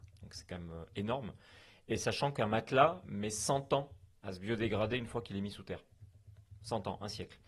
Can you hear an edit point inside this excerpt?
no; 0 cuts

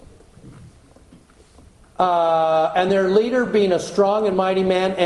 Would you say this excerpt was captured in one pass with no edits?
yes; 0 cuts

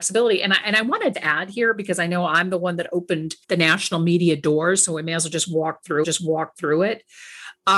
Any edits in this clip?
yes; 3 cuts; at 1.1 s, 3.4 s, 6.0 s

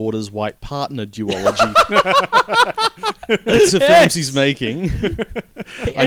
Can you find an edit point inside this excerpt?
yes; 1 cut; at 3.7 s

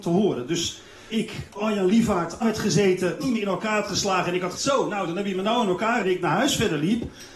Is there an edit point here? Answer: yes; 6 cuts; at 1.1 s, 1.6 s, 2.4 s, 3.2 s, 4.5 s, 6.0 s

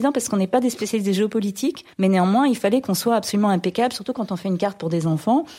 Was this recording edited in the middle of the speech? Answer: yes; 1 cut; at 1.9 s

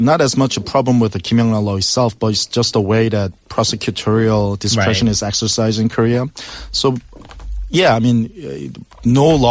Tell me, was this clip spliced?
no; 0 cuts

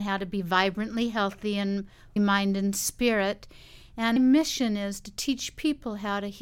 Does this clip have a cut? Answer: yes; 2 cuts; at 2.2 s, 4.2 s

